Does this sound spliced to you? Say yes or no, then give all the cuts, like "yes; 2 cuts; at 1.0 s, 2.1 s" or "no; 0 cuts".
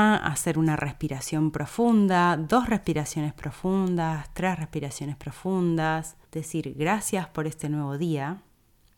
yes; 1 cut; at 6.2 s